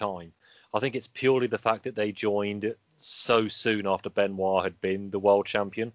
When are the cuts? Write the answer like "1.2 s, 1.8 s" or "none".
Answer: 2.8 s